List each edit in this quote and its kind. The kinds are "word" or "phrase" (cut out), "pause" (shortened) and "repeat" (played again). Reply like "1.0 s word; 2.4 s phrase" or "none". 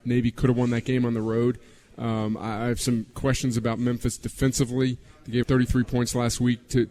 5.4 s word